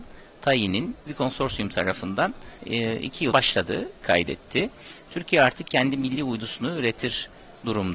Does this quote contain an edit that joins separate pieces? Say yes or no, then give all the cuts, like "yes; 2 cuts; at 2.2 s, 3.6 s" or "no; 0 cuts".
yes; 4 cuts; at 1.1 s, 2.6 s, 3.3 s, 4.0 s